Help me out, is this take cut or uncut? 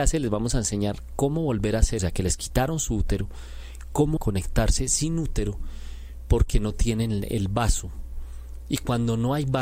cut